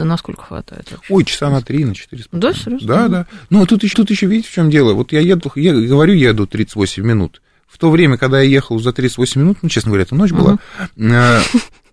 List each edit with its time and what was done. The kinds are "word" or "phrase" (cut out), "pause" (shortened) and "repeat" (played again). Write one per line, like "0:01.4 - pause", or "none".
0:03.9 - repeat